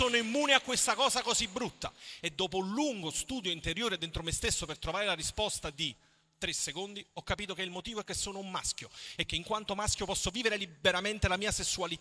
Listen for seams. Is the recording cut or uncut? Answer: uncut